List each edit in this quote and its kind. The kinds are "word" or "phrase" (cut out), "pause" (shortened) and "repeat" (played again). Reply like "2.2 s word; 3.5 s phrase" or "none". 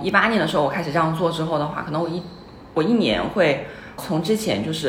4.0 s word